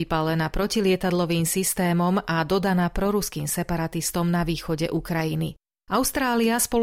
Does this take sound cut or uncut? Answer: uncut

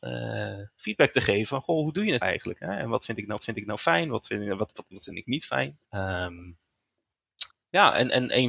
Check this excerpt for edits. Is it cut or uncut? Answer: cut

